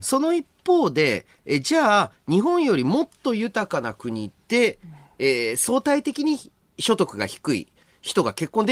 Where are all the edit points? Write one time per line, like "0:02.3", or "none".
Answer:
none

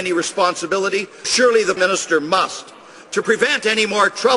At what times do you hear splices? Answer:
0:01.2
0:01.8
0:03.2

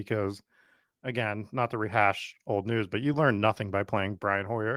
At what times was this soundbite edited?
none

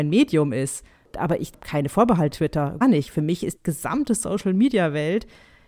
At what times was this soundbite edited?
0:02.3
0:02.8
0:03.6

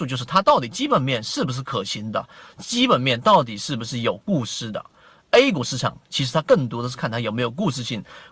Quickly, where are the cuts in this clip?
none

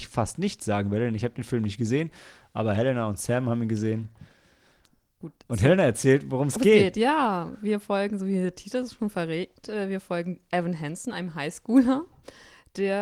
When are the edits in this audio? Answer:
none

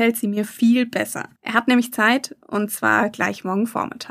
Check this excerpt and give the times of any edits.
0:01.4

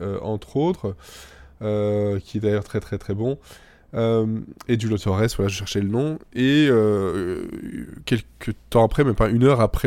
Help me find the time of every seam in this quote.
none

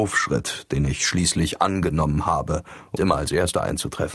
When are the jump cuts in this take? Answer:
0:03.0

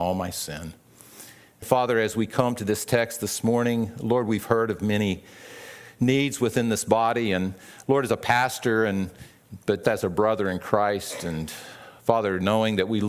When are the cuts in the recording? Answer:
0:01.6
0:09.8

